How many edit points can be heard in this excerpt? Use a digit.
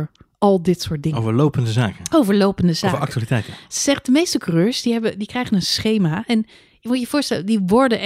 0